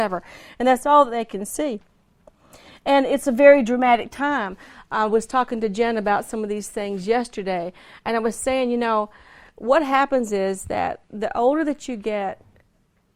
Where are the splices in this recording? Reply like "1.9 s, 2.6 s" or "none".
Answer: none